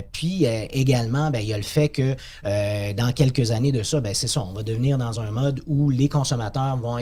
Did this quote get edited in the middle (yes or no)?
no